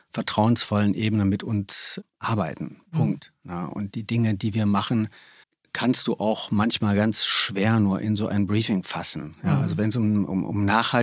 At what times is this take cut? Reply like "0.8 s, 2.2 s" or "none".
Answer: 5.4 s